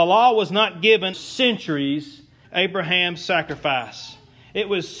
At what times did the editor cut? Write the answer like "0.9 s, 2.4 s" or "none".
1.1 s, 2.4 s